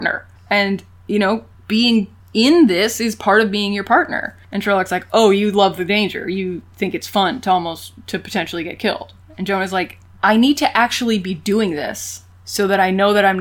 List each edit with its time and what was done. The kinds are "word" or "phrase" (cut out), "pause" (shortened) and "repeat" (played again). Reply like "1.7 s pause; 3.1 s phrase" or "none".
none